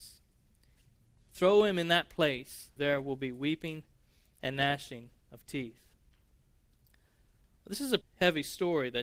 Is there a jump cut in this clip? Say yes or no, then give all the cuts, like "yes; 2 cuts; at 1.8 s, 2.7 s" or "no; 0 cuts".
yes; 2 cuts; at 2.8 s, 8.0 s